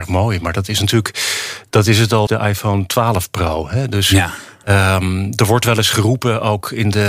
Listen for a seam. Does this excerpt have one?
yes; 1 cut; at 2.3 s

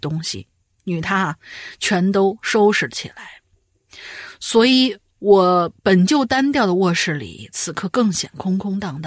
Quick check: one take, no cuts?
no; 1 cut; at 5.8 s

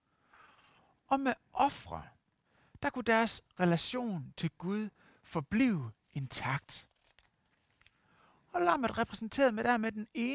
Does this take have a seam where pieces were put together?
no; 0 cuts

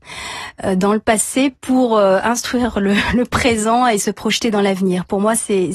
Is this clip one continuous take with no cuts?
yes; 0 cuts

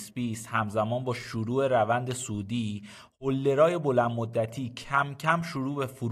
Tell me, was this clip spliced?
no; 0 cuts

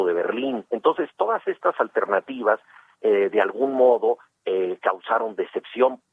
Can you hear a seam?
no; 0 cuts

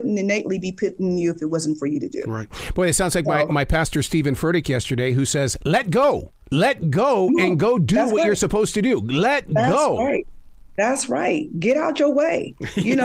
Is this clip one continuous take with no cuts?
yes; 0 cuts

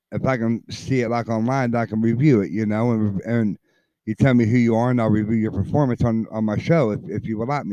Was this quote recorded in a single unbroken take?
yes; 0 cuts

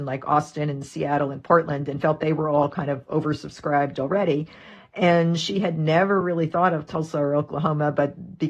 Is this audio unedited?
yes; 0 cuts

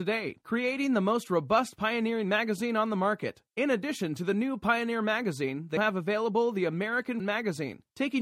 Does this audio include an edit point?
yes; 3 cuts; at 3.5 s, 5.8 s, 7.2 s

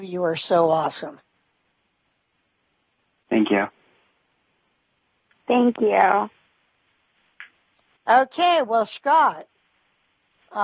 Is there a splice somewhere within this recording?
no; 0 cuts

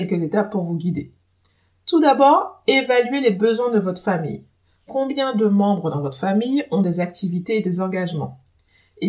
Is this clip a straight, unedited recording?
yes; 0 cuts

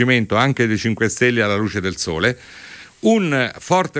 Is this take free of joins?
yes; 0 cuts

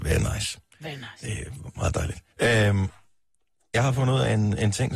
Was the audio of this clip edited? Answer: yes; 1 cut; at 2.3 s

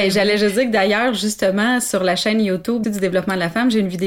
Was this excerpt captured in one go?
no; 1 cut; at 2.8 s

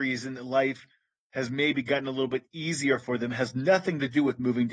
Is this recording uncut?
yes; 0 cuts

